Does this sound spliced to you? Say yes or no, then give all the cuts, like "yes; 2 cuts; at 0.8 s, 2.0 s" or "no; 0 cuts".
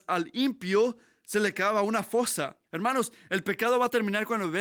yes; 1 cut; at 2.6 s